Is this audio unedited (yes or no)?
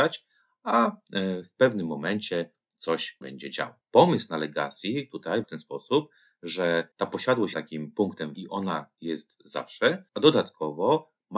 no